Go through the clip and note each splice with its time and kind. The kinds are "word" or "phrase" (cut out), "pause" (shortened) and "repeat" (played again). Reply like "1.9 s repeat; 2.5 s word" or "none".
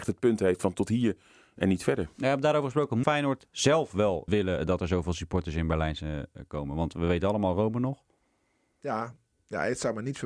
3.0 s word; 4.3 s word